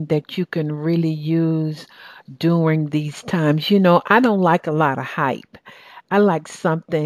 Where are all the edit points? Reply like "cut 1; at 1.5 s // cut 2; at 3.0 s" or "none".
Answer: none